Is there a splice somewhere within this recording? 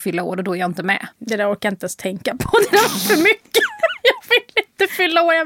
yes; 1 cut; at 1.1 s

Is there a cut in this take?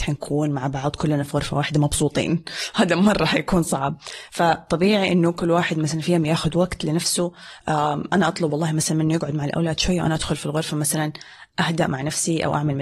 no; 0 cuts

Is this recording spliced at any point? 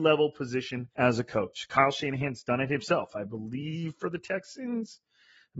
yes; 1 cut; at 0.9 s

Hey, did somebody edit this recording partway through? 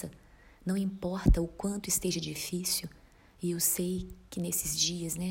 no; 0 cuts

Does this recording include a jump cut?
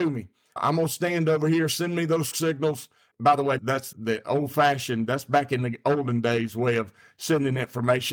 yes; 2 cuts; at 2.3 s, 3.9 s

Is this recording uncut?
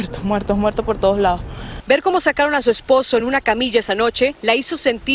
yes; 0 cuts

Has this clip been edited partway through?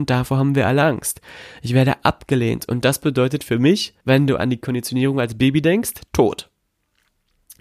yes; 1 cut; at 4.0 s

